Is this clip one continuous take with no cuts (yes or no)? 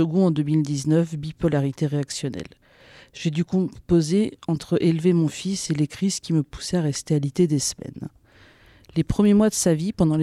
yes